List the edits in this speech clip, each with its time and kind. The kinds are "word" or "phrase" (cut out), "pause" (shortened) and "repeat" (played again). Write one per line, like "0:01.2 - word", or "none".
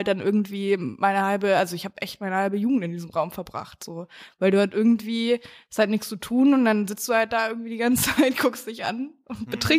none